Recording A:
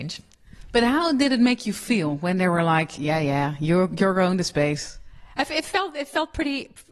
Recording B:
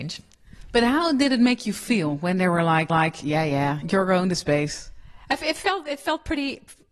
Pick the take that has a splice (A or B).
B